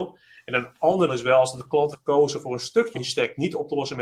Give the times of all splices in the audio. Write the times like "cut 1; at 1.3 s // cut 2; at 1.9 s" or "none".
cut 1; at 1.1 s // cut 2; at 1.9 s // cut 3; at 2.9 s